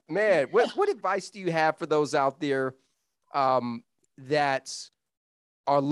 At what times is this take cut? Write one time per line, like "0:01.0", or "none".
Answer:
none